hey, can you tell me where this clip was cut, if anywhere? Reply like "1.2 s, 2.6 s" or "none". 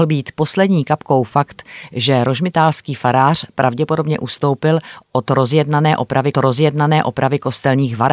6.3 s